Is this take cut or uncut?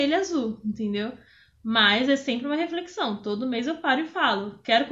uncut